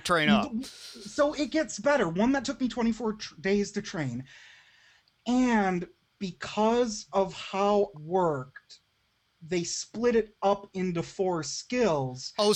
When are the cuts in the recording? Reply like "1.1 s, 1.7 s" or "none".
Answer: 7.9 s